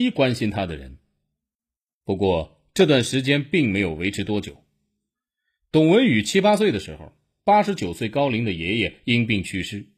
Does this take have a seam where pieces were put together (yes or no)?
no